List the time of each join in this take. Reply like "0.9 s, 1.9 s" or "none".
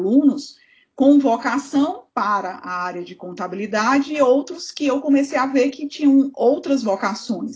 2.1 s